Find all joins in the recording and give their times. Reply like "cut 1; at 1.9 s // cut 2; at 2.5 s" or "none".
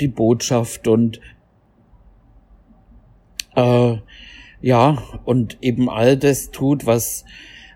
none

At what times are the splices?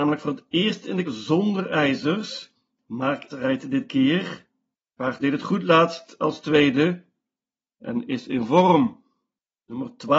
cut 1; at 1.0 s // cut 2; at 3.3 s // cut 3; at 5.2 s

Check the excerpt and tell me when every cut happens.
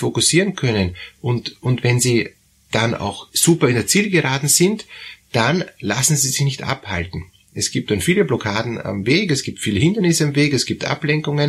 none

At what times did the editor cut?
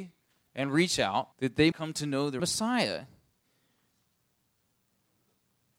cut 1; at 1.3 s // cut 2; at 1.7 s // cut 3; at 2.4 s

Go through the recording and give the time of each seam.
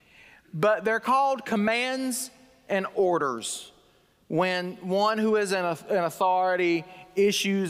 none

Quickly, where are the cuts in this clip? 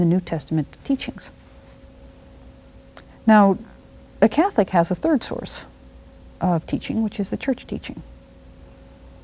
none

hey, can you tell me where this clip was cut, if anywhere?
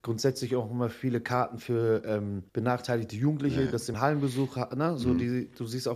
cut 1; at 2.5 s // cut 2; at 3.9 s

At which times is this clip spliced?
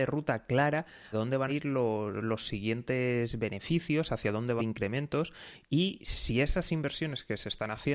cut 1; at 1.1 s // cut 2; at 1.5 s // cut 3; at 4.6 s

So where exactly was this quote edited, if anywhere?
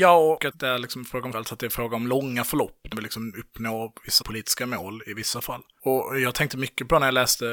cut 1; at 1.3 s // cut 2; at 2.9 s // cut 3; at 4.2 s

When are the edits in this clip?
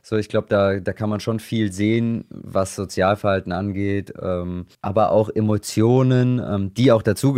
cut 1; at 4.7 s

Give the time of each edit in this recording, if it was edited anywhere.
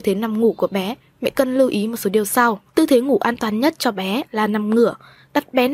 cut 1; at 2.7 s

